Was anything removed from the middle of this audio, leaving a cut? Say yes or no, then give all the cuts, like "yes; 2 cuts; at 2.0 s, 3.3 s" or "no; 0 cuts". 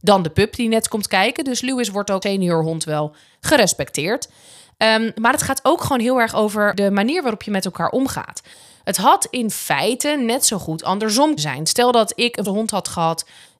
yes; 3 cuts; at 2.2 s, 11.4 s, 12.5 s